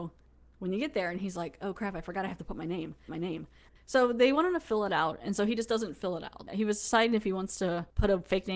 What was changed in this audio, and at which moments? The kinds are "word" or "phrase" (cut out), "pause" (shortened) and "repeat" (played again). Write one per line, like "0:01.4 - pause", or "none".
0:03.1 - repeat
0:06.5 - word